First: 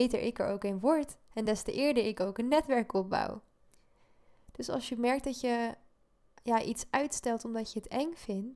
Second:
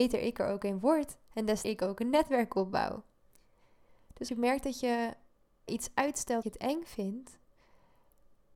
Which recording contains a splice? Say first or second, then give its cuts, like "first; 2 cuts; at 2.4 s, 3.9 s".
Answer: second; 4 cuts; at 1.6 s, 4.3 s, 5.7 s, 6.4 s